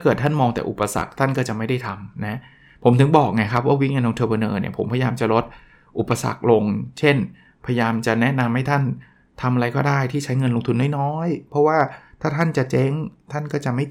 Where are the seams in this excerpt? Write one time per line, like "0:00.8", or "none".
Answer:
none